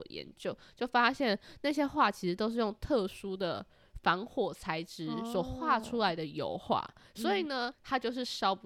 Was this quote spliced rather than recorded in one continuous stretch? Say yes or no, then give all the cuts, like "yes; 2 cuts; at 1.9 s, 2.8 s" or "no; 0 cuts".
yes; 1 cut; at 7.7 s